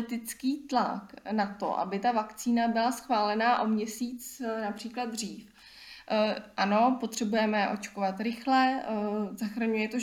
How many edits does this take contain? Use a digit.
0